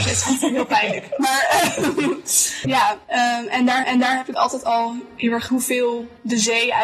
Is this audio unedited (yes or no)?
no